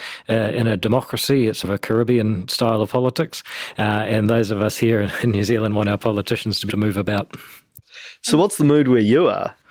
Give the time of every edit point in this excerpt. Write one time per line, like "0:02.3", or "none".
0:01.6
0:06.7